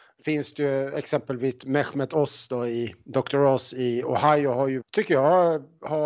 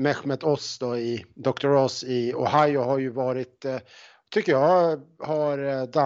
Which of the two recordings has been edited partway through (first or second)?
first